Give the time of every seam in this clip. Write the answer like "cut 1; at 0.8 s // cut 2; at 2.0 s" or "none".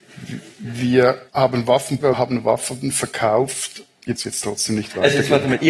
cut 1; at 1.3 s // cut 2; at 2.0 s // cut 3; at 4.2 s